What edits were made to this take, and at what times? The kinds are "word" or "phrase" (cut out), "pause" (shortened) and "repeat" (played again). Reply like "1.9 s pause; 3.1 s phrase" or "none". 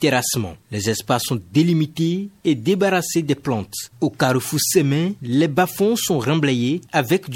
none